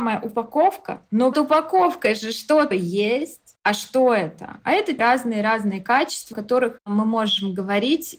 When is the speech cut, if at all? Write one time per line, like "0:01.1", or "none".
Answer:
0:01.3
0:02.7
0:05.0
0:06.3